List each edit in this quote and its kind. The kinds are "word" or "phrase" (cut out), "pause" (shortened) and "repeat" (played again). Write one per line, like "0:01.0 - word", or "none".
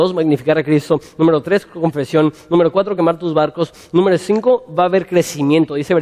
none